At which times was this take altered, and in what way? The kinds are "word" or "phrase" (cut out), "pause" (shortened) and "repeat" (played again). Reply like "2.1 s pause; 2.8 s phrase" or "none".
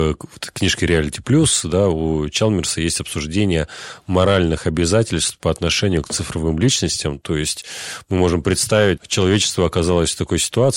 9.0 s word